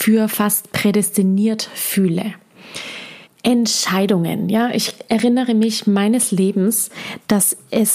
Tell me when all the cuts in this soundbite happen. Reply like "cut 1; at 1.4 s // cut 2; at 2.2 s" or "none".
cut 1; at 3.2 s